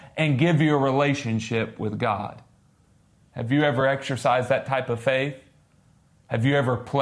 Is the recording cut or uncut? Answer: uncut